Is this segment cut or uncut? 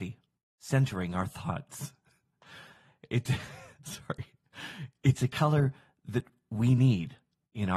uncut